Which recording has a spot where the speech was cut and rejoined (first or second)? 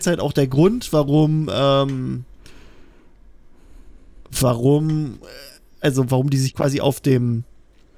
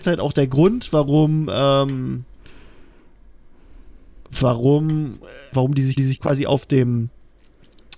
second